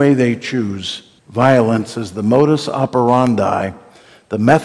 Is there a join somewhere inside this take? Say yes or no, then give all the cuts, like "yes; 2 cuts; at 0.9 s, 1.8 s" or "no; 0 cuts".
yes; 1 cut; at 1.2 s